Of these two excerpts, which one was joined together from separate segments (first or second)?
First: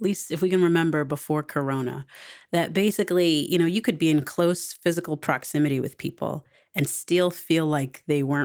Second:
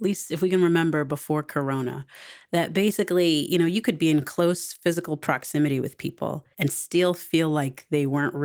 second